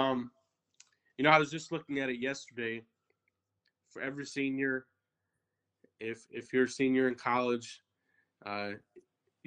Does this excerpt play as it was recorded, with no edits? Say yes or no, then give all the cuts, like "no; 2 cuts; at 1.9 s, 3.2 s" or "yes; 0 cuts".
yes; 0 cuts